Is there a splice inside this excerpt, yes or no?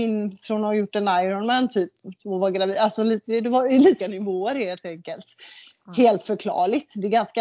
yes